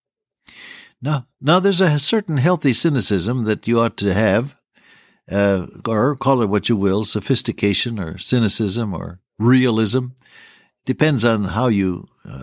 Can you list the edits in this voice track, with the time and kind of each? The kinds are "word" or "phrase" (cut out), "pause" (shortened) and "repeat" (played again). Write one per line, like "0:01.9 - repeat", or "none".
none